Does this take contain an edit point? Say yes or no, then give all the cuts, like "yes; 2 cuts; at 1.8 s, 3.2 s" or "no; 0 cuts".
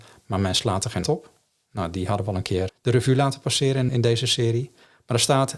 yes; 3 cuts; at 1.0 s, 2.7 s, 3.9 s